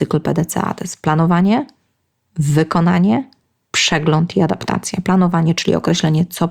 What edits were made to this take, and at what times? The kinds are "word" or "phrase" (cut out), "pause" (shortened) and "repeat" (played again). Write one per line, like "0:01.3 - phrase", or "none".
none